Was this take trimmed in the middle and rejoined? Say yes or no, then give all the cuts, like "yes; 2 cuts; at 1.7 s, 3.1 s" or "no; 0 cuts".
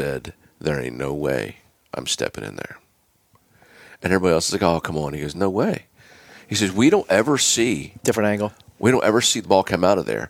no; 0 cuts